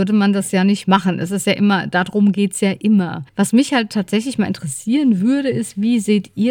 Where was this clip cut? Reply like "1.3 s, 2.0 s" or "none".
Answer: 3.3 s